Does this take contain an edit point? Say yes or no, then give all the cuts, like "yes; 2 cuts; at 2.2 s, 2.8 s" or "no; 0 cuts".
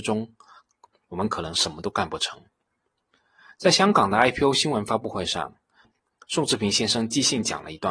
no; 0 cuts